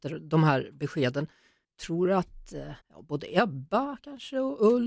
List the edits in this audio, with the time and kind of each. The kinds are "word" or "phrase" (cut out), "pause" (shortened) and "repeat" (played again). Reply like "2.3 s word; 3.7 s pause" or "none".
1.6 s pause; 2.8 s pause